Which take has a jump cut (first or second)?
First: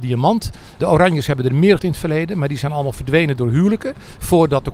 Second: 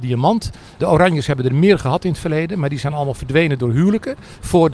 first